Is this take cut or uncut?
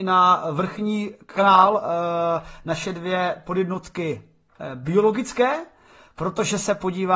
uncut